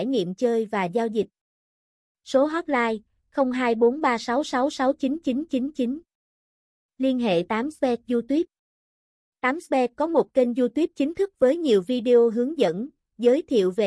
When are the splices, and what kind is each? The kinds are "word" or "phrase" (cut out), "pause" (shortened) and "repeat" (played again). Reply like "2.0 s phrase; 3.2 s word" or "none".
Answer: none